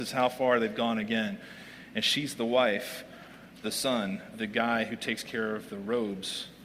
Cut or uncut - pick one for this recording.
cut